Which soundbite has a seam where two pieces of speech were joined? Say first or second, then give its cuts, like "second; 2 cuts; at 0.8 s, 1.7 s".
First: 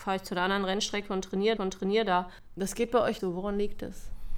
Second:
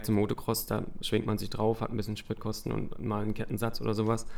first; 2 cuts; at 1.6 s, 3.2 s